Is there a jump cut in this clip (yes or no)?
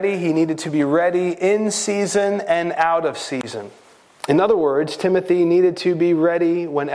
yes